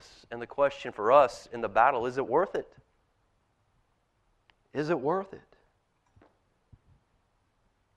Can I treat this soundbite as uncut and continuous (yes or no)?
yes